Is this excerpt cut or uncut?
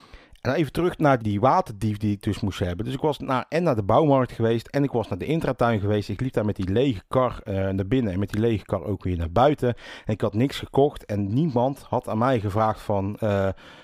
cut